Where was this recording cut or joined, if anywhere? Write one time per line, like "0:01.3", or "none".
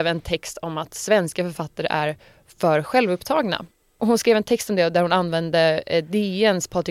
none